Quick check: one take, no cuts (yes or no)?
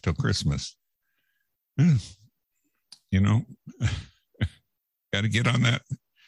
yes